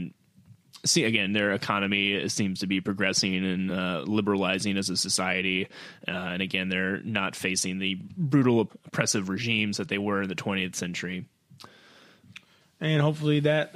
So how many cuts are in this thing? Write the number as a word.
zero